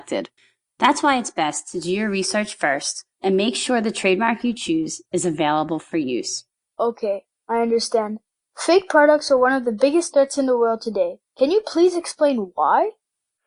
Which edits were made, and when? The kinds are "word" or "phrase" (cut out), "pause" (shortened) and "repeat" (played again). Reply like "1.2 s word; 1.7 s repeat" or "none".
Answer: 3.1 s pause; 8.3 s pause; 11.3 s pause